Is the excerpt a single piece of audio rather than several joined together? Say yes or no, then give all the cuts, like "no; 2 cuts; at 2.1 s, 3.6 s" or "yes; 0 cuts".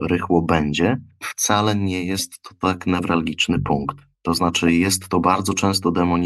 no; 1 cut; at 4.1 s